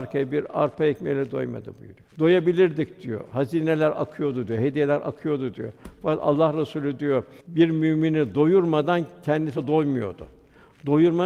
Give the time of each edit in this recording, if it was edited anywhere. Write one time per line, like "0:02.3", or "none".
0:02.1
0:07.4